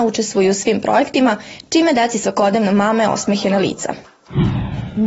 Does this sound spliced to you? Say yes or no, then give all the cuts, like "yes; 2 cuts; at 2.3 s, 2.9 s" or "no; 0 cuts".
no; 0 cuts